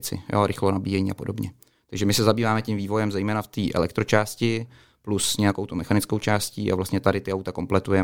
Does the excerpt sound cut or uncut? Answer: uncut